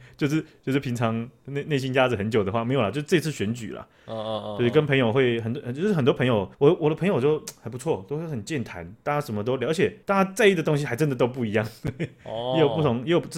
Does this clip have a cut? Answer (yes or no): yes